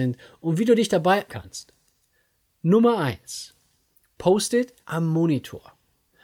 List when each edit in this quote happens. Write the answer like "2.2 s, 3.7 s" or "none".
1.3 s, 4.8 s

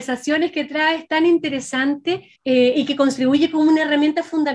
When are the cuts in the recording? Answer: 2.3 s

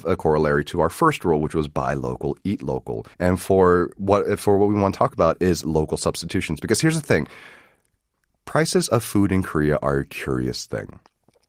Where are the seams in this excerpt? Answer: 3.1 s

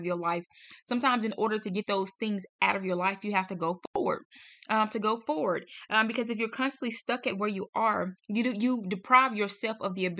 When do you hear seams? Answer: 8.2 s

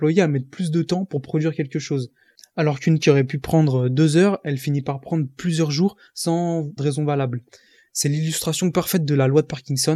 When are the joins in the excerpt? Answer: 3.0 s, 6.8 s

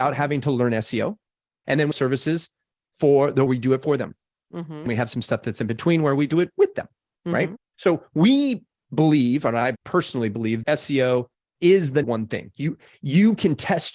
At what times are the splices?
1.9 s, 3.5 s, 4.9 s, 10.6 s, 12.0 s

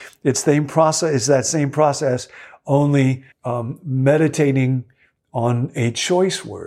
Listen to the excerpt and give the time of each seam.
3.3 s

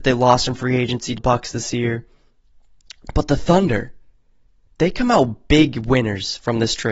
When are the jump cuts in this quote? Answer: 1.2 s

